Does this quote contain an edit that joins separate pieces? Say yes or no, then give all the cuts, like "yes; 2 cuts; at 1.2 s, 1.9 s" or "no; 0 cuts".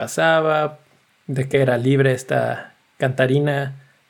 no; 0 cuts